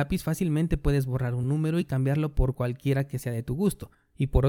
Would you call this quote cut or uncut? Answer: uncut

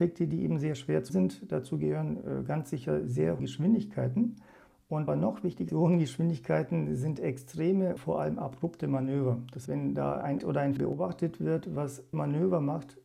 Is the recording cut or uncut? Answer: cut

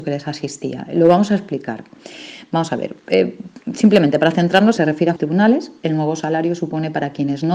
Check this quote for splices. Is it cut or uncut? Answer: cut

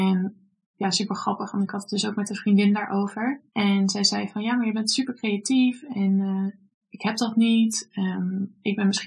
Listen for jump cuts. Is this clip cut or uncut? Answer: cut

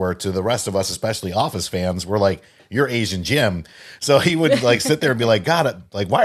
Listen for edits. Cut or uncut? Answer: uncut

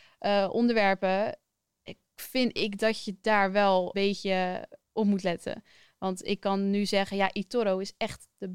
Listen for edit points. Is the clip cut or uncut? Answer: cut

